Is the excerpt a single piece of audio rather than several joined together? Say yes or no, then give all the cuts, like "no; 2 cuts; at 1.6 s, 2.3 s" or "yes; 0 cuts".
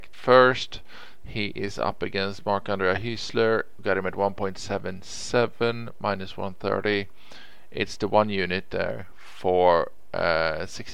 yes; 0 cuts